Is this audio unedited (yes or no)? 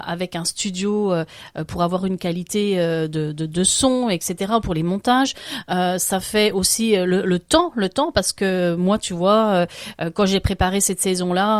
yes